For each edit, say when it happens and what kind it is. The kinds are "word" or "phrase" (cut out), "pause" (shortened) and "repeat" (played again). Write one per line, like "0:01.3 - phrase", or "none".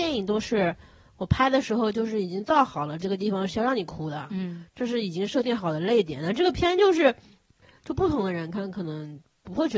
none